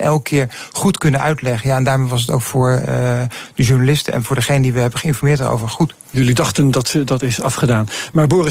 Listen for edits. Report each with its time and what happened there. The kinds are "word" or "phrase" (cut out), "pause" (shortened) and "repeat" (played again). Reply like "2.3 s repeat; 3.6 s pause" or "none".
none